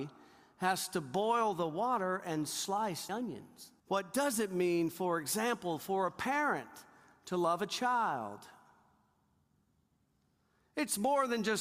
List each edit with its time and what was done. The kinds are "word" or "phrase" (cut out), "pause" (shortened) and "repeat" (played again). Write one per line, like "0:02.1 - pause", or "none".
0:03.1 - word
0:03.8 - pause